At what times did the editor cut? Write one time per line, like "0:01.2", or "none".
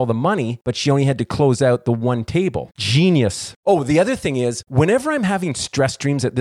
none